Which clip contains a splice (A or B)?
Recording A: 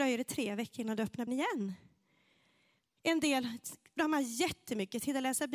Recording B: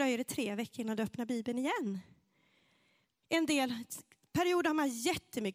A